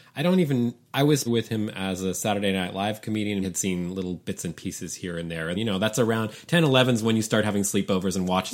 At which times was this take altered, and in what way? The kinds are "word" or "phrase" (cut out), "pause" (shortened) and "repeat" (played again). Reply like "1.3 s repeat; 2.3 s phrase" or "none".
1.3 s phrase; 3.4 s word; 5.5 s word